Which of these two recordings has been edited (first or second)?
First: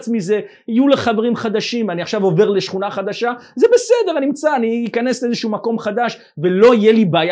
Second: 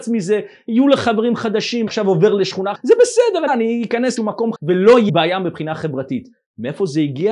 second